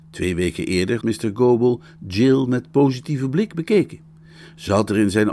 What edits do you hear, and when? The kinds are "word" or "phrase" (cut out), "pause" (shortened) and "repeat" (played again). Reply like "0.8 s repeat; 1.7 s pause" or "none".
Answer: 1.0 s word